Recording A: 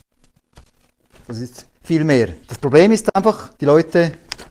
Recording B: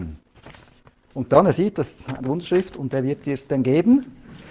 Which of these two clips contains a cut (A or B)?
A